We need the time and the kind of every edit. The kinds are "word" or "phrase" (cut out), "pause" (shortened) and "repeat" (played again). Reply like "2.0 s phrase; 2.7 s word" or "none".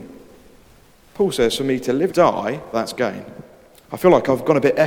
2.1 s phrase; 2.7 s word; 3.8 s pause